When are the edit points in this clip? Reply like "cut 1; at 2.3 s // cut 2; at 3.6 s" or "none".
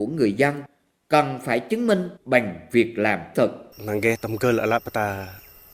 cut 1; at 2.2 s // cut 2; at 3.3 s // cut 3; at 3.7 s